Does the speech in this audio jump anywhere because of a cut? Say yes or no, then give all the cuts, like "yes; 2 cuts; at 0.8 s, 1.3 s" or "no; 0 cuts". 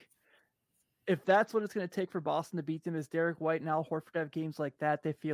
no; 0 cuts